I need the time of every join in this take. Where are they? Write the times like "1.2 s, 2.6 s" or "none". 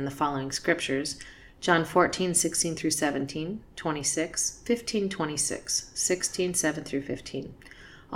none

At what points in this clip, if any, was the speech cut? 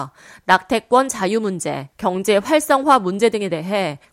1.9 s

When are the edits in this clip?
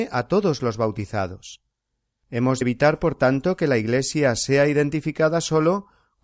2.6 s

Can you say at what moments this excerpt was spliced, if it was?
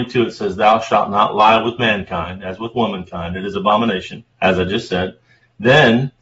4.3 s

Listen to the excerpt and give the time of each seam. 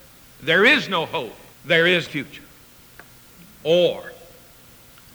1.5 s, 2.1 s

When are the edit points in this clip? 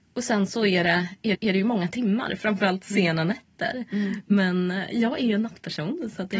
1.3 s

